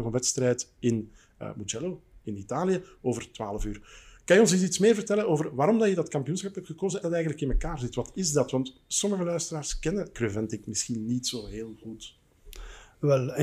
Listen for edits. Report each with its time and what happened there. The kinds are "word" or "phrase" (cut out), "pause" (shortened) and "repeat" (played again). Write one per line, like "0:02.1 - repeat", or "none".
0:07.0 - phrase